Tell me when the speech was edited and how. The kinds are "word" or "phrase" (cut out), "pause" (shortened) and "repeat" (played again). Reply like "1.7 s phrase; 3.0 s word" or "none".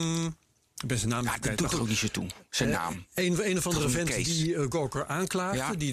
2.5 s pause